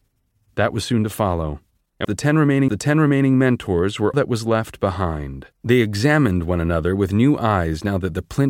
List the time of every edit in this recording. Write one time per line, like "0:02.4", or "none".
0:02.0
0:02.7
0:04.1
0:05.5